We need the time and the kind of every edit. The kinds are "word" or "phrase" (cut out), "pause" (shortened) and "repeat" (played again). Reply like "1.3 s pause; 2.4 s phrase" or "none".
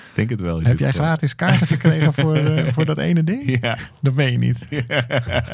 none